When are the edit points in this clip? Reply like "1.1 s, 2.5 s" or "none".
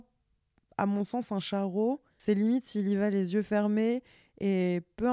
none